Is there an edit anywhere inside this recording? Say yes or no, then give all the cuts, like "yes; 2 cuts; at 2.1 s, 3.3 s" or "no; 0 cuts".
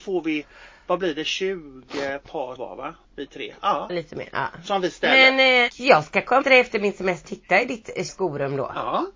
yes; 7 cuts; at 2.6 s, 3.0 s, 3.9 s, 5.7 s, 6.4 s, 7.2 s, 8.1 s